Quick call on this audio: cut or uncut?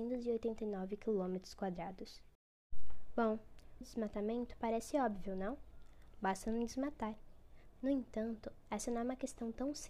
cut